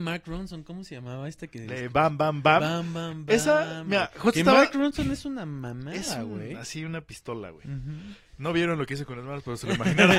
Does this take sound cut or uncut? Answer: uncut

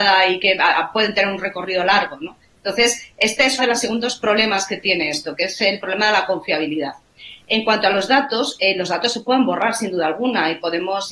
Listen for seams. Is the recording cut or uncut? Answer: cut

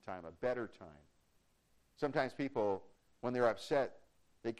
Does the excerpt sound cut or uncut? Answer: uncut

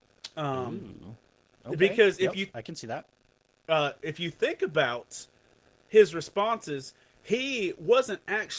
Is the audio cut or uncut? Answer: uncut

